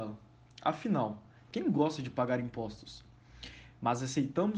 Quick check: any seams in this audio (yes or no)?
no